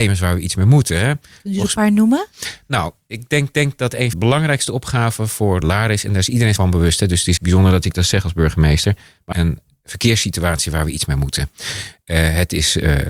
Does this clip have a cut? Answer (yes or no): yes